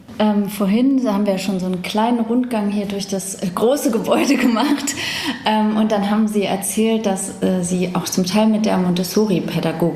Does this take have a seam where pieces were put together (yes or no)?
no